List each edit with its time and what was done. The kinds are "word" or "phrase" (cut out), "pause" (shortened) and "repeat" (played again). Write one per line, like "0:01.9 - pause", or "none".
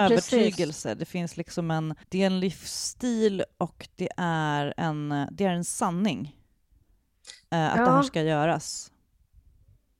0:02.0 - pause